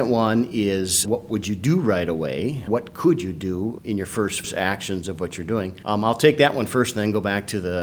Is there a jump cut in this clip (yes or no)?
yes